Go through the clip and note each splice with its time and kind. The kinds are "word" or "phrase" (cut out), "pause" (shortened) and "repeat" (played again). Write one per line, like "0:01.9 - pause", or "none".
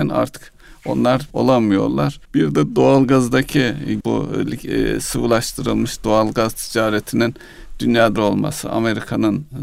0:01.3 - word
0:02.2 - pause
0:04.0 - word
0:08.2 - word